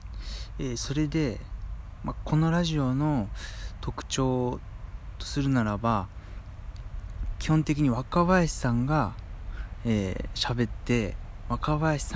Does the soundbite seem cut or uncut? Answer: uncut